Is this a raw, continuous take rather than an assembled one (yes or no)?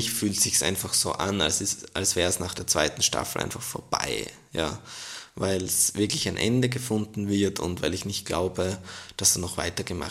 yes